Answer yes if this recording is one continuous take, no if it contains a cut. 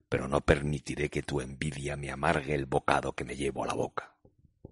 yes